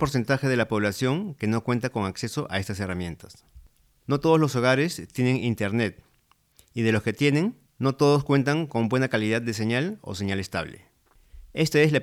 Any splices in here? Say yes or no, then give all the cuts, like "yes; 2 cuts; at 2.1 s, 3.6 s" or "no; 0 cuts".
yes; 1 cut; at 7.7 s